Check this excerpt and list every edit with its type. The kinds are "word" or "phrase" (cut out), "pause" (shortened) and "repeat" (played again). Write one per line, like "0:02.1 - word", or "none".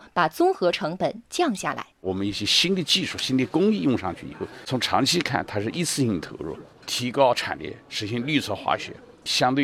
0:01.9 - pause